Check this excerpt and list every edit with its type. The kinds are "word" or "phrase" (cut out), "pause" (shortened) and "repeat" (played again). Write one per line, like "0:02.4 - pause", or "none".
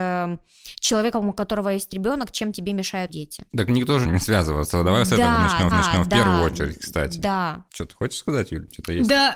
0:03.1 - word
0:03.5 - pause
0:04.0 - phrase
0:05.7 - repeat
0:07.7 - pause